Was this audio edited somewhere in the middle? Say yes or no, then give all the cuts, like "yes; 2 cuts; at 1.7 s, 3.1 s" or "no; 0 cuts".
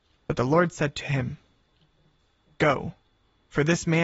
no; 0 cuts